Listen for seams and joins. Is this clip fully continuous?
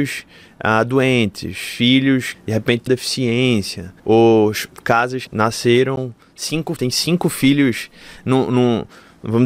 no; 5 cuts; at 2.3 s, 2.9 s, 4.0 s, 5.3 s, 6.8 s

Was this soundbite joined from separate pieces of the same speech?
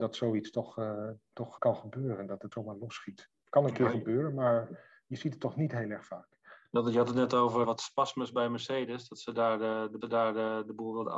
yes; 4 cuts; at 1.6 s, 2.5 s, 7.6 s, 10.0 s

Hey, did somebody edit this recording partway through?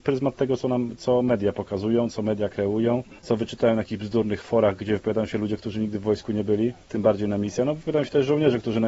yes; 2 cuts; at 3.2 s, 6.8 s

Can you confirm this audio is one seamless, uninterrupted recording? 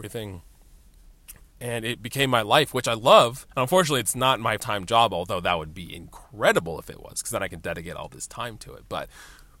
no; 2 cuts; at 3.5 s, 4.6 s

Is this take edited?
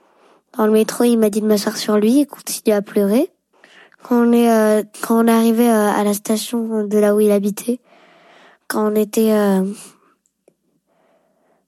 no; 0 cuts

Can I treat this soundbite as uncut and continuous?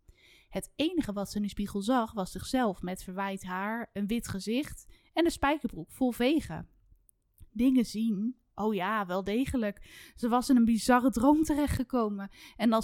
yes; 0 cuts

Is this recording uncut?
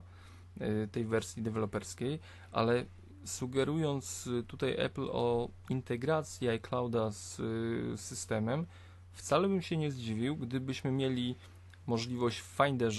yes; 0 cuts

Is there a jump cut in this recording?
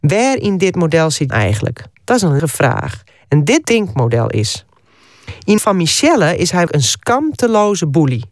yes; 7 cuts; at 1.3 s, 1.9 s, 2.4 s, 3.1 s, 3.6 s, 5.6 s, 6.7 s

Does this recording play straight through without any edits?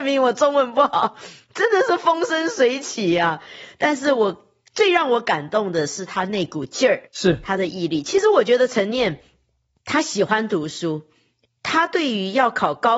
no; 1 cut; at 7.1 s

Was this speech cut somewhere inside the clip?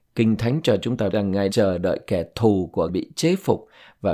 yes; 3 cuts; at 1.1 s, 1.5 s, 2.9 s

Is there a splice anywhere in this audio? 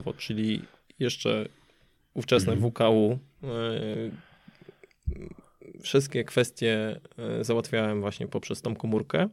no; 0 cuts

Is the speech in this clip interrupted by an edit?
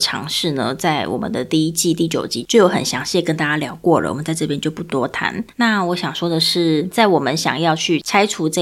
yes; 1 cut; at 5.5 s

